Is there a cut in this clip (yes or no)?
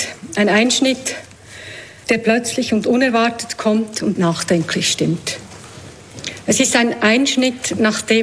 yes